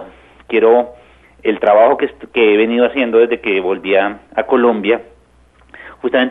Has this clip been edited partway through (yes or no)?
no